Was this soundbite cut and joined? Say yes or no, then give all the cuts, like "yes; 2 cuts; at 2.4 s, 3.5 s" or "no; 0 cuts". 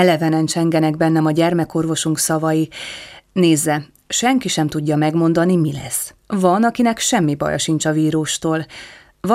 yes; 1 cut; at 6.2 s